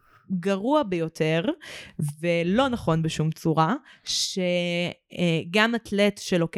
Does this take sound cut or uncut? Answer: uncut